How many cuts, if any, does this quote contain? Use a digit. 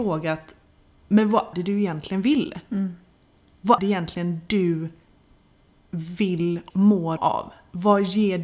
4